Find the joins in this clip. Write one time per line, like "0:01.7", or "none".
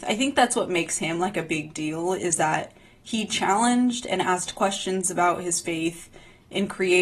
none

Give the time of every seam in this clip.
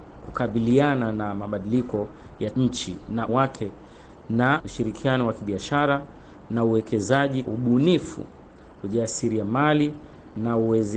0:02.5
0:03.3
0:04.6
0:07.4

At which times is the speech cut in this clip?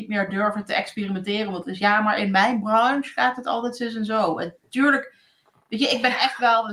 none

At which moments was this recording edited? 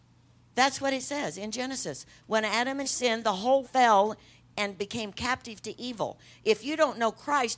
0:02.8
0:03.6

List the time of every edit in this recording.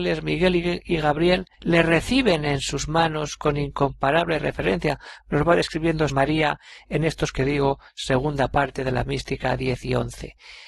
0:01.5
0:06.1
0:07.3

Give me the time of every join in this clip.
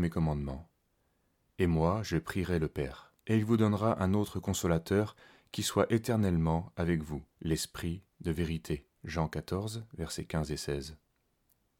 0:03.2
0:07.3
0:08.9

